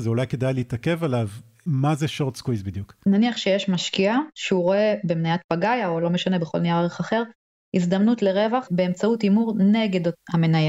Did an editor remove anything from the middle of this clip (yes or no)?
no